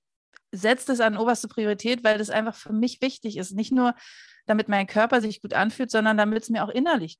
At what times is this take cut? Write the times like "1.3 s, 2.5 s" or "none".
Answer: none